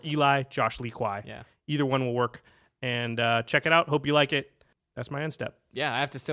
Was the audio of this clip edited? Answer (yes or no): yes